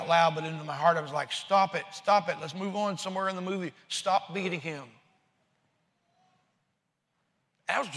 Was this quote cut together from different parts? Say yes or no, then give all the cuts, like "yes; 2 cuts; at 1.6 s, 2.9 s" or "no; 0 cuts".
no; 0 cuts